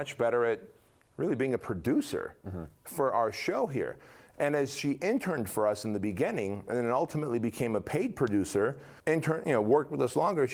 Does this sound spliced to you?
yes; 1 cut; at 9.0 s

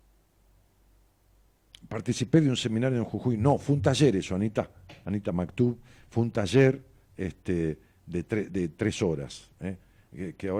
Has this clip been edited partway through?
no; 0 cuts

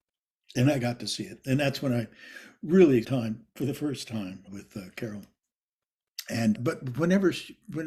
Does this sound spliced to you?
yes; 3 cuts; at 3.0 s, 4.5 s, 6.5 s

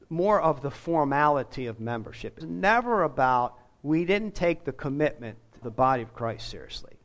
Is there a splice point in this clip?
yes; 2 cuts; at 2.4 s, 5.6 s

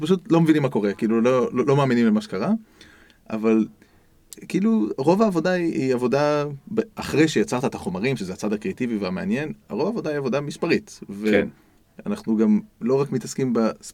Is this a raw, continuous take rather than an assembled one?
yes; 0 cuts

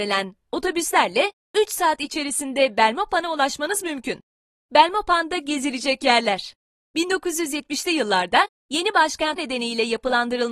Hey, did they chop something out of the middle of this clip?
yes; 1 cut; at 9.4 s

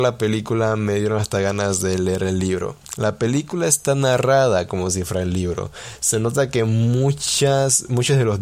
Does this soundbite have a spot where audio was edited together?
no; 0 cuts

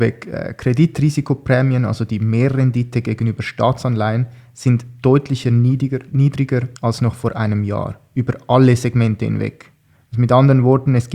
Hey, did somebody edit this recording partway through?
yes; 1 cut; at 6.8 s

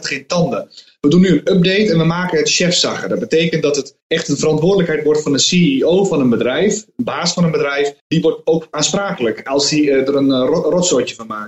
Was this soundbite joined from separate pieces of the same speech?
yes; 2 cuts; at 4.0 s, 8.0 s

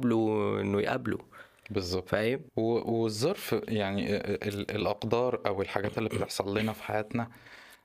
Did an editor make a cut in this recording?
yes; 1 cut; at 2.5 s

